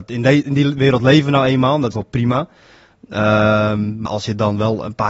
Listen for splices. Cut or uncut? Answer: cut